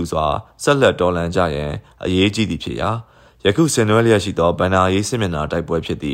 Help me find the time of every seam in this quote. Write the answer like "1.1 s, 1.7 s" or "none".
none